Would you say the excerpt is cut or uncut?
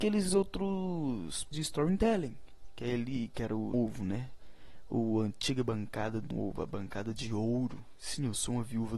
cut